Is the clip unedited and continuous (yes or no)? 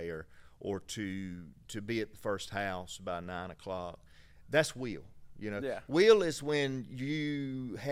yes